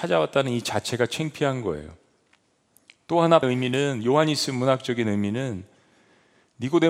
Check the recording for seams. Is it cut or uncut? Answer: cut